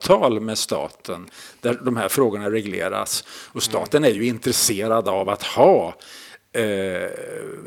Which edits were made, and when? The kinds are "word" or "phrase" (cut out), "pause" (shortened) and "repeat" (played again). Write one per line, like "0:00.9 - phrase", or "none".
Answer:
none